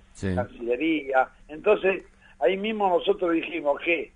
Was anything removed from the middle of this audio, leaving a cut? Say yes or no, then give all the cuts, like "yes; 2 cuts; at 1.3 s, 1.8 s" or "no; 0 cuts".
yes; 1 cut; at 1.4 s